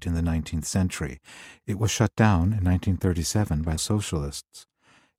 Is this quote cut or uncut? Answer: cut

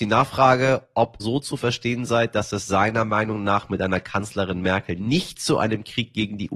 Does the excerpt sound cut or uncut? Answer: cut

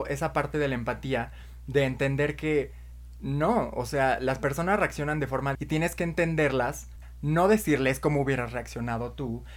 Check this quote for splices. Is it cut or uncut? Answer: cut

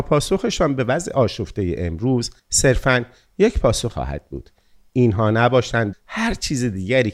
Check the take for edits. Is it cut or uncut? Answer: cut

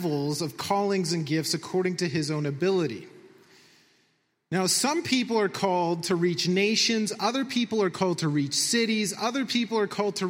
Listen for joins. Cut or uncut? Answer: uncut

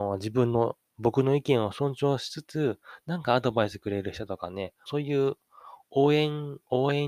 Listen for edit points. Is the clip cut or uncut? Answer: cut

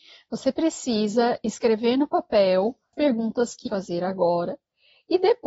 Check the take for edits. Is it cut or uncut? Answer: cut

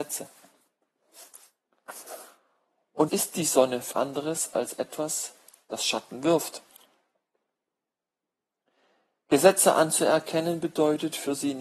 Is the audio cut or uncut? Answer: cut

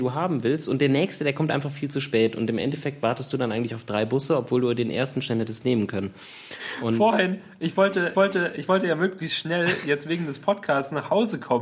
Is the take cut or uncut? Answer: cut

